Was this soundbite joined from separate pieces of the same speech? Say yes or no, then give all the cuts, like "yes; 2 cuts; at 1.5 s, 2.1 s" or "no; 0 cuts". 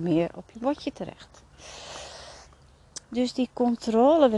no; 0 cuts